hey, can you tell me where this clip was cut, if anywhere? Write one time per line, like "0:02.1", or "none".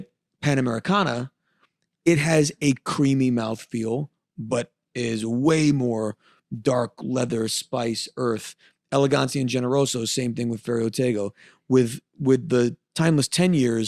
none

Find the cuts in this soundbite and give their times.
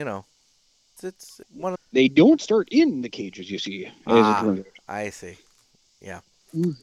0:01.0
0:01.4
0:01.8

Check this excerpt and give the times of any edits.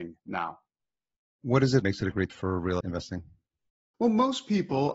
0:01.8
0:02.3
0:02.8

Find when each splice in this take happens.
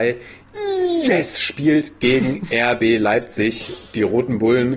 none

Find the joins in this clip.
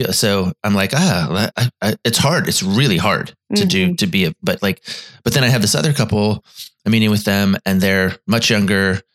0:01.5

